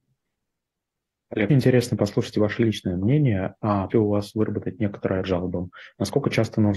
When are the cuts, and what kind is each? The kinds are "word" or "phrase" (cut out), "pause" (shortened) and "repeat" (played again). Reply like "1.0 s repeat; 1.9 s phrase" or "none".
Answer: 1.5 s word; 3.9 s word; 5.2 s word